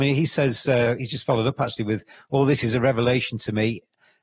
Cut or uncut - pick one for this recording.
uncut